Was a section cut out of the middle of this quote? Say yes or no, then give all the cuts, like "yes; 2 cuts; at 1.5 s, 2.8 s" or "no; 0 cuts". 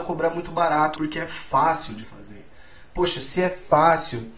yes; 2 cuts; at 1.0 s, 2.0 s